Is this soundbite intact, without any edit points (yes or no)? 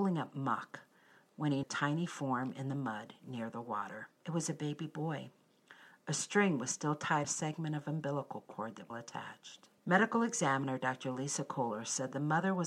no